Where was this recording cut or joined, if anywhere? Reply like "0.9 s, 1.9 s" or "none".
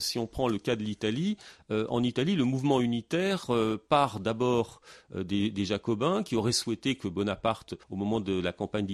7.8 s